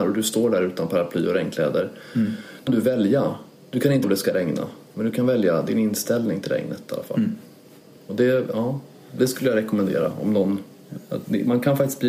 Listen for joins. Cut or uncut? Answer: cut